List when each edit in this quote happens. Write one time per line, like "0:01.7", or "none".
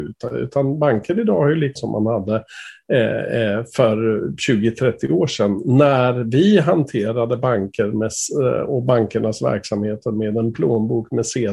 0:01.8